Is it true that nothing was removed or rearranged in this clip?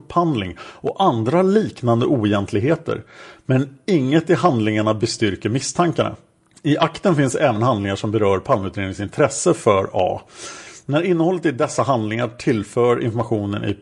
yes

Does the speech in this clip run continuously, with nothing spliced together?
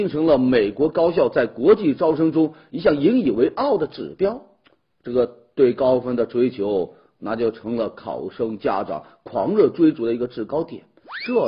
yes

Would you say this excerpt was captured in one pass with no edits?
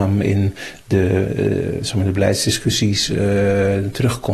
yes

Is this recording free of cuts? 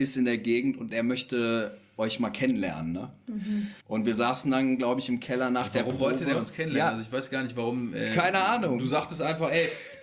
no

